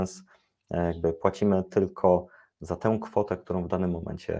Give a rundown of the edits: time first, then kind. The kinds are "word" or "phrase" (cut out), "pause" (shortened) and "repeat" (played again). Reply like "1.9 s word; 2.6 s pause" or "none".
none